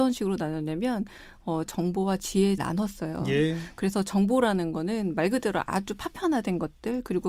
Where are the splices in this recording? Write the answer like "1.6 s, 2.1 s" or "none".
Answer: 1.7 s, 2.6 s